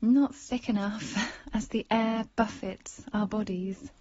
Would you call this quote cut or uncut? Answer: uncut